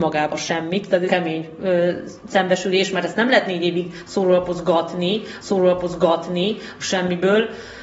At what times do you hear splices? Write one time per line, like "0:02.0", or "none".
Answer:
0:01.1
0:05.4